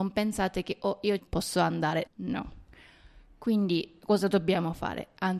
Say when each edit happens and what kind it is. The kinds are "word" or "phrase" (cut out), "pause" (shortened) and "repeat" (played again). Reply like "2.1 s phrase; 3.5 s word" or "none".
1.2 s phrase; 2.1 s word